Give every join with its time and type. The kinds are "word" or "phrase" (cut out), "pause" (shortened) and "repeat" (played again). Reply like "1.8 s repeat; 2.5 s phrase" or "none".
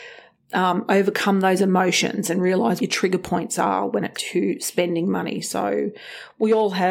2.8 s word; 4.1 s word